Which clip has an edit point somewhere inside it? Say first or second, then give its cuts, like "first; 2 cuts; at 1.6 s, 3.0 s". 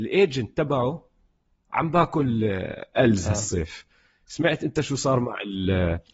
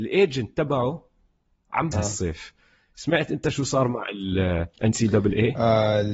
second; 1 cut; at 1.9 s